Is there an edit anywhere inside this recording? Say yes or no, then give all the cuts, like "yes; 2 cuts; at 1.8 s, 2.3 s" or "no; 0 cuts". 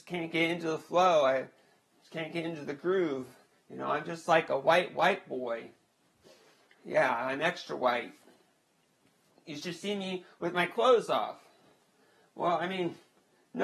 no; 0 cuts